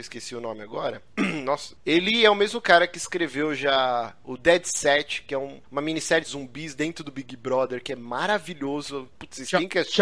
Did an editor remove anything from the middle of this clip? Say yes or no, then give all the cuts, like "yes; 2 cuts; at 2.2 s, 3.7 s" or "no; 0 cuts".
yes; 1 cut; at 6.2 s